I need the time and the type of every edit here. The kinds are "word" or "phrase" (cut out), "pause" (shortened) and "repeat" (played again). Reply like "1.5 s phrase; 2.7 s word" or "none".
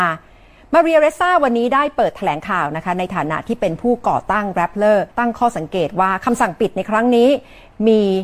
5.1 s pause